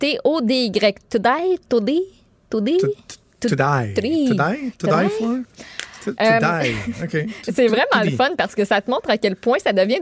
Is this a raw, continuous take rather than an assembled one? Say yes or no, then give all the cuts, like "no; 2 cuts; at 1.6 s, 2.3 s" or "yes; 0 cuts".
yes; 0 cuts